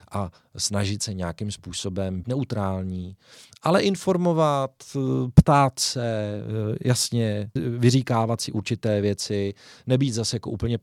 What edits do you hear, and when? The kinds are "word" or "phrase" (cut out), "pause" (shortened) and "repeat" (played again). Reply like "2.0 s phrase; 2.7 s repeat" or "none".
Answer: 2.2 s phrase; 7.6 s phrase